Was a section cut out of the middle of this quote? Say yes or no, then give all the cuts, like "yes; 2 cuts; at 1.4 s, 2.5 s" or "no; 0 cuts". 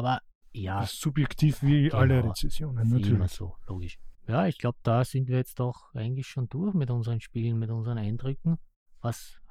yes; 1 cut; at 4.2 s